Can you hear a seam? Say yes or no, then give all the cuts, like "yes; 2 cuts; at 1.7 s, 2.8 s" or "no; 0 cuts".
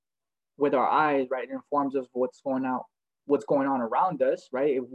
no; 0 cuts